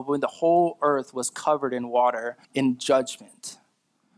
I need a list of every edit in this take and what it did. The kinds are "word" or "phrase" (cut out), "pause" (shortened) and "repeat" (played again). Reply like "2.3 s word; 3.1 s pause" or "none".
2.4 s pause